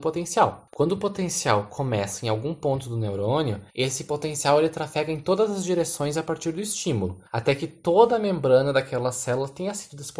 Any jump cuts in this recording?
yes; 2 cuts; at 3.7 s, 7.3 s

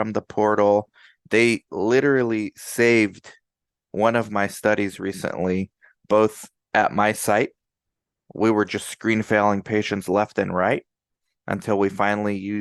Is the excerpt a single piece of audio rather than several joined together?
yes; 0 cuts

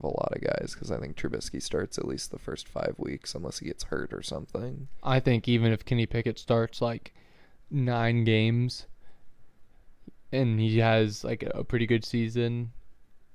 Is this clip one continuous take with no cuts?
yes; 0 cuts

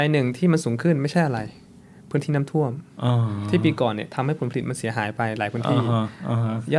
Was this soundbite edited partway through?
no; 0 cuts

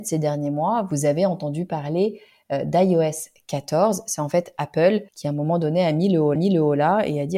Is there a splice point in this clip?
yes; 2 cuts; at 5.1 s, 6.4 s

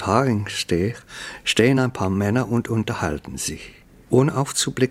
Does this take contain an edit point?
no; 0 cuts

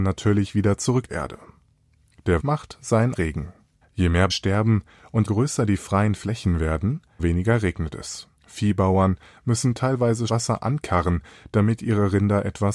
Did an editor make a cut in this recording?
yes; 9 cuts; at 1.1 s, 2.4 s, 3.1 s, 3.8 s, 4.3 s, 5.2 s, 7.2 s, 8.4 s, 10.3 s

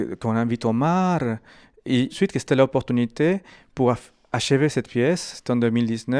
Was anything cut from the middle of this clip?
yes; 1 cut; at 2.1 s

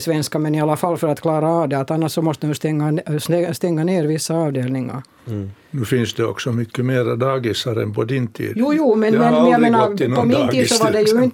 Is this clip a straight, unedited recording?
yes; 0 cuts

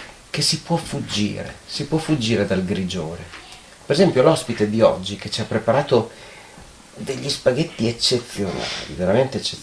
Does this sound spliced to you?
no; 0 cuts

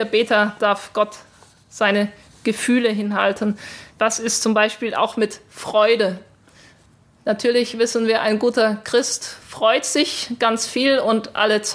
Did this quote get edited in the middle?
yes; 1 cut; at 3.9 s

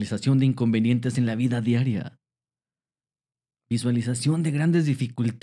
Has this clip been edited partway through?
no; 0 cuts

